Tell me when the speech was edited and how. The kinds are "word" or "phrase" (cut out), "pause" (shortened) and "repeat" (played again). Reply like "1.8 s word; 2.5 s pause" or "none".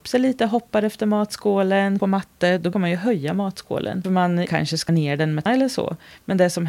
2.0 s phrase; 2.7 s word; 4.5 s phrase; 4.9 s word; 5.5 s word